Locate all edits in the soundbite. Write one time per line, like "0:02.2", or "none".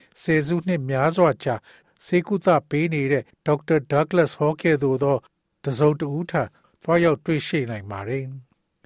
0:03.3